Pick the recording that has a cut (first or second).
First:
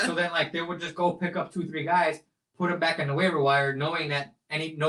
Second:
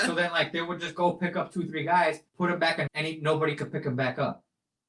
second